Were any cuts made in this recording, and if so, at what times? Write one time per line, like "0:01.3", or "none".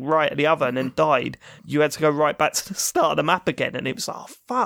0:01.6